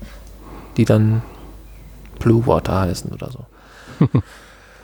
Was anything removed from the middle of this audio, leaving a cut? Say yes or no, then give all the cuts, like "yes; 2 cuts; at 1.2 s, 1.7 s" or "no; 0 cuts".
no; 0 cuts